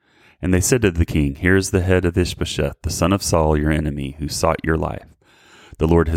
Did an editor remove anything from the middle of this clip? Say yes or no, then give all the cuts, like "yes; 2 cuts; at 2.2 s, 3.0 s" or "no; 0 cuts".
no; 0 cuts